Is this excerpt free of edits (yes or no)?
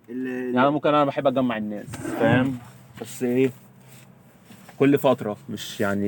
yes